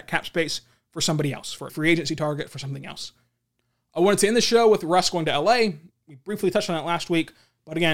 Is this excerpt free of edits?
no; 1 cut; at 1.7 s

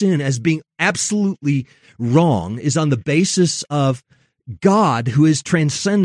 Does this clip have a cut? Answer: no; 0 cuts

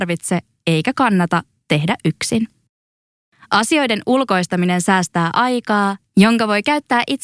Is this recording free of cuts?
yes; 0 cuts

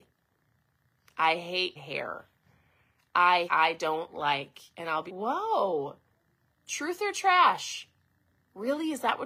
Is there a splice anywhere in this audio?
yes; 3 cuts; at 1.8 s, 3.5 s, 5.1 s

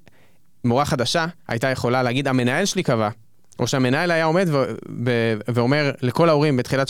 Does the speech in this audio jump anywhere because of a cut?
yes; 1 cut; at 1.4 s

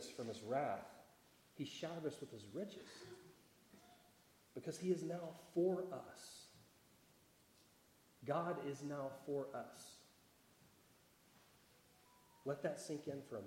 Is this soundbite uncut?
yes; 0 cuts

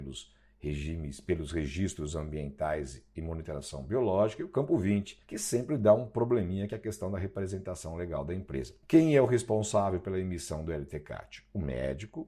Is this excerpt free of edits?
no; 2 cuts; at 5.2 s, 8.8 s

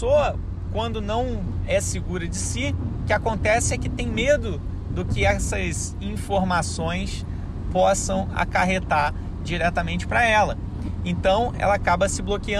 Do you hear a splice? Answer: no; 0 cuts

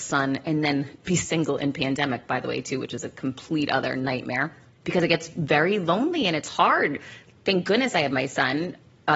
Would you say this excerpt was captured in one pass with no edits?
yes; 0 cuts

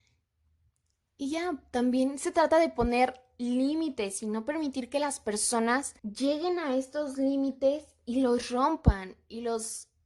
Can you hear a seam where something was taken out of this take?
yes; 1 cut; at 6.0 s

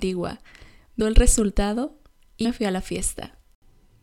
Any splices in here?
yes; 2 cuts; at 1.0 s, 2.4 s

